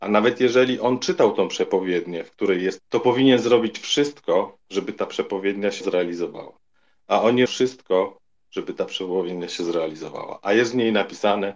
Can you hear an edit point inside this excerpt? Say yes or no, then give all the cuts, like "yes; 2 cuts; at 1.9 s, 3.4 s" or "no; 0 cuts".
yes; 5 cuts; at 2.8 s, 4.6 s, 5.8 s, 7.5 s, 8.4 s